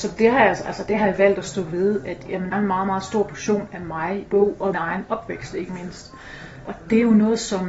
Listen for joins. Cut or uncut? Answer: cut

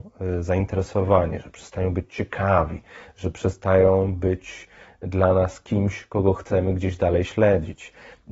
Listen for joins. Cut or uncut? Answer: uncut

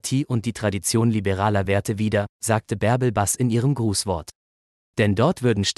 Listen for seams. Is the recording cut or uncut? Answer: uncut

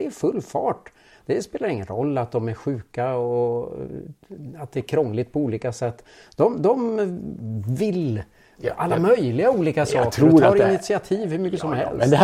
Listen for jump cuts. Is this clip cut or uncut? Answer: uncut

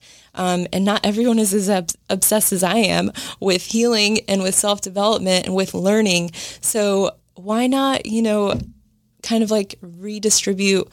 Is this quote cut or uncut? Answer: uncut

